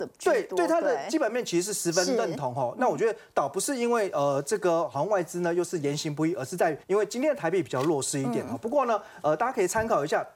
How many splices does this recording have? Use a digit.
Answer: 1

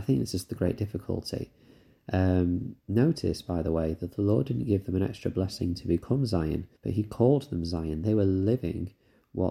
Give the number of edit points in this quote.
2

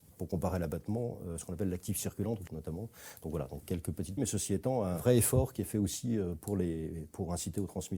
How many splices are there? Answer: 2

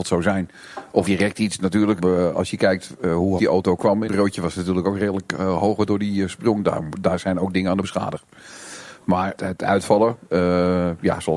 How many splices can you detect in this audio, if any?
6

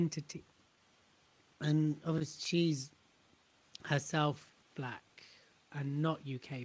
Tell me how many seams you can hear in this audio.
1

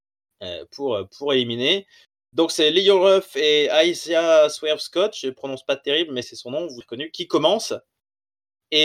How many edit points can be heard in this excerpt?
2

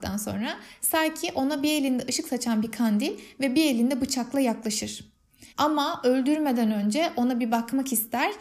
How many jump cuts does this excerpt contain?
1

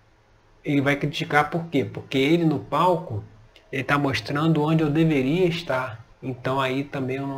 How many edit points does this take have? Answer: 1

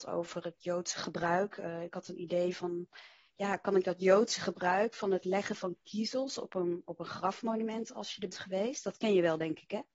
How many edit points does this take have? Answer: 1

